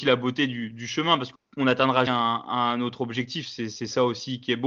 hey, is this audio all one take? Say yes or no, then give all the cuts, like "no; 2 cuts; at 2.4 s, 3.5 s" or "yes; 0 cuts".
no; 2 cuts; at 1.3 s, 2.1 s